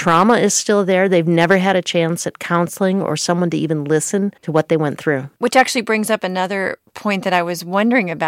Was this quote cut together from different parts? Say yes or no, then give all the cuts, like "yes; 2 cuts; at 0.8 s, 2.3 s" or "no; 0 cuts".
yes; 2 cuts; at 4.4 s, 5.4 s